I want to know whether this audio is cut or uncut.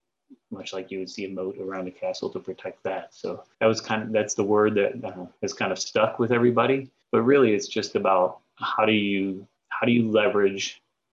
cut